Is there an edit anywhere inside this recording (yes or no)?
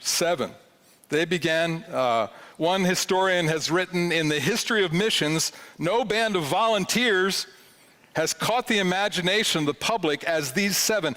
no